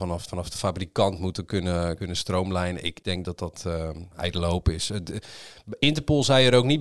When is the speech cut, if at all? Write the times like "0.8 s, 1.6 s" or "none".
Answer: none